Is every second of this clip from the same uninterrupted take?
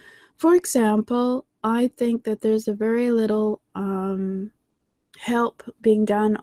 yes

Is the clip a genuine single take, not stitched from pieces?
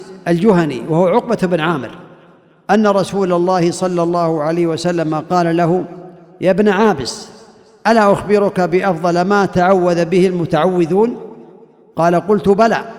yes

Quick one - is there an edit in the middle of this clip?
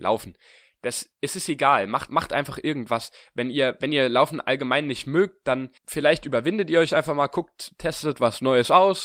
yes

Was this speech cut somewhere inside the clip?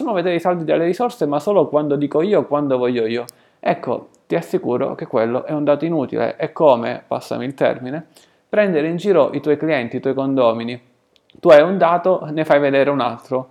no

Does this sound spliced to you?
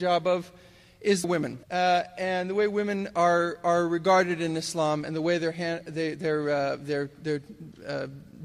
yes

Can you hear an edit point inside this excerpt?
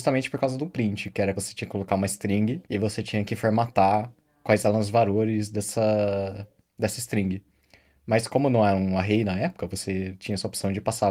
yes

